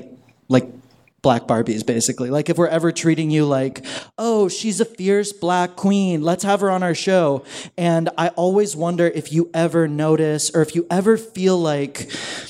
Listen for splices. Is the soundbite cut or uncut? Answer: uncut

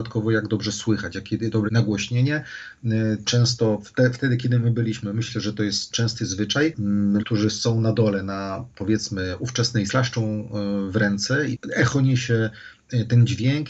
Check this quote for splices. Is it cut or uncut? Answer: cut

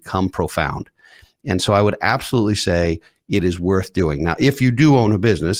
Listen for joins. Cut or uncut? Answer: uncut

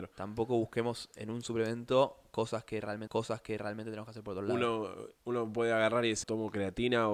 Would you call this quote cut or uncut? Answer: cut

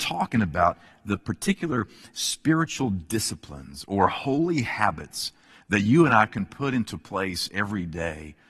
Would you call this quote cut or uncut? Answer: uncut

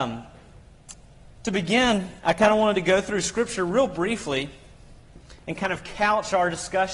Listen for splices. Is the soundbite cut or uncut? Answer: cut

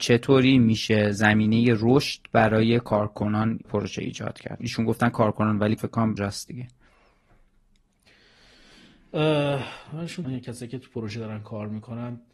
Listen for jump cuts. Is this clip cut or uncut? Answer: cut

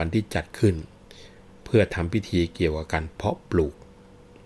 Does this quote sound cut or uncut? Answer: uncut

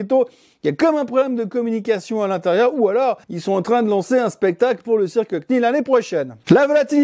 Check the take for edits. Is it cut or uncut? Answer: cut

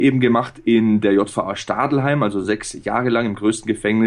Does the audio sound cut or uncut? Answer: uncut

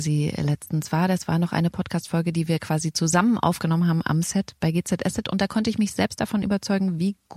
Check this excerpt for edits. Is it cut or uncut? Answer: uncut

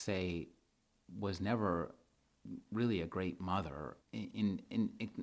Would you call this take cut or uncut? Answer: cut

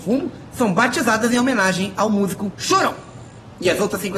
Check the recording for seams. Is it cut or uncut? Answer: uncut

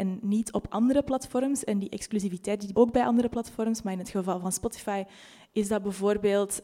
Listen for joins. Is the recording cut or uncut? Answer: cut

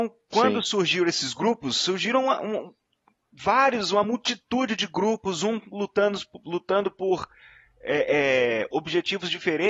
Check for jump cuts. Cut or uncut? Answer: uncut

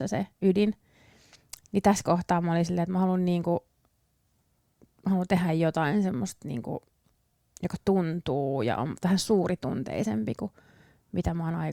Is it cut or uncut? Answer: uncut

